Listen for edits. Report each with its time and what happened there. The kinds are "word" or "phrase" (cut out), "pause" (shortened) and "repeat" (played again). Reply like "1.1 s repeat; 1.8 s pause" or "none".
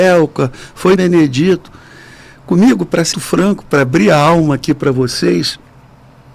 1.0 s word; 3.1 s word